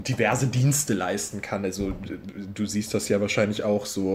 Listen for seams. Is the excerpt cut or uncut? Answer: uncut